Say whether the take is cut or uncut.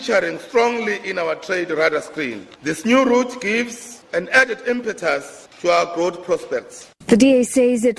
cut